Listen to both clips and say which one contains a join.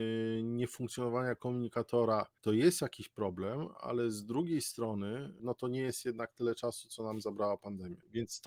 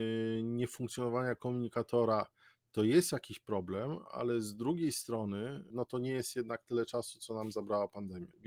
first; 1 cut; at 2.4 s

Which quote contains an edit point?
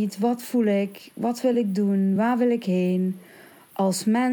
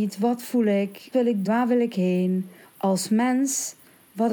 second; 3 cuts; at 1.1 s, 1.4 s, 2.6 s

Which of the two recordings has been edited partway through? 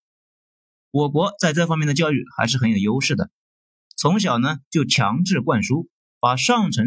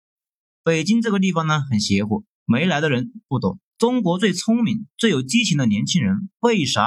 second; 2 cuts; at 2.3 s, 3.7 s

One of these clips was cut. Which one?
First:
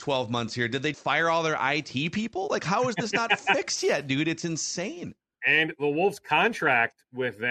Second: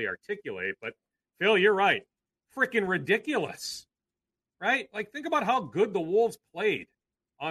first; 1 cut; at 0.9 s

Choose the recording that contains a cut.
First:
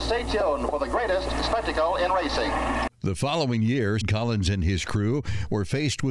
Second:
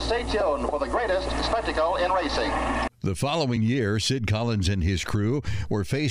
first; 1 cut; at 4.0 s

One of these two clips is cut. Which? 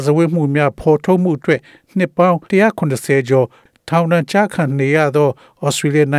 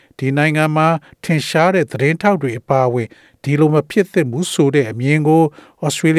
first; 1 cut; at 2.5 s

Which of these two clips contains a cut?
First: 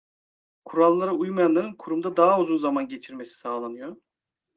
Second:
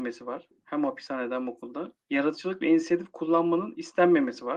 second; 1 cut; at 2.0 s

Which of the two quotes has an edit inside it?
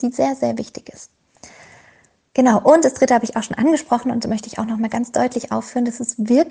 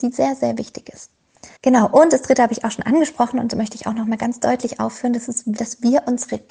second; 2 cuts; at 1.6 s, 5.6 s

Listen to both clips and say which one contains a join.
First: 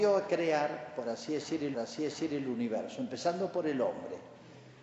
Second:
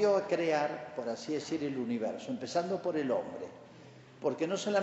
first; 1 cut; at 1.7 s

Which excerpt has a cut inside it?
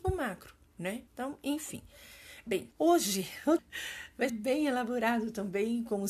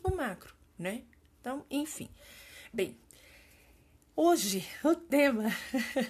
first; 4 cuts; at 1.1 s, 2.7 s, 3.6 s, 4.3 s

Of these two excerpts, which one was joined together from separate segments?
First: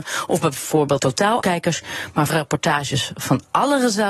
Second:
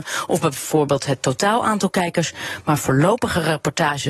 first; 3 cuts; at 1.0 s, 1.4 s, 2.3 s

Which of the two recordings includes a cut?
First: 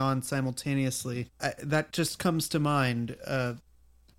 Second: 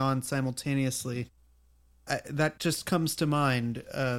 first; 1 cut; at 1.3 s

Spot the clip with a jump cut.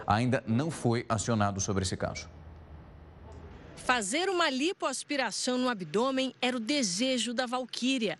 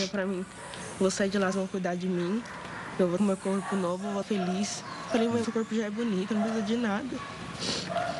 second; 5 cuts; at 1.5 s, 3.2 s, 4.2 s, 5.4 s, 6.3 s

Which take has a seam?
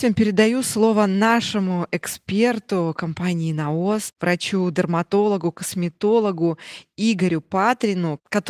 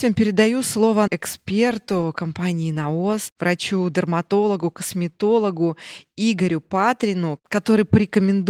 second; 1 cut; at 1.1 s

